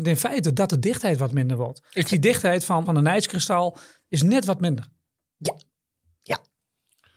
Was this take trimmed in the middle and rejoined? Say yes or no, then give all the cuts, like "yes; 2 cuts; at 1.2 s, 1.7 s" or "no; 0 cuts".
yes; 2 cuts; at 2.1 s, 2.8 s